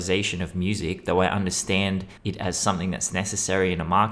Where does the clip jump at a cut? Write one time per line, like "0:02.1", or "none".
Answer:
0:02.2